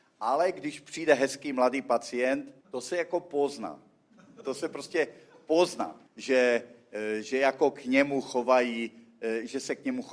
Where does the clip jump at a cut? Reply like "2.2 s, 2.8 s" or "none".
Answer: 2.6 s, 4.4 s, 6.1 s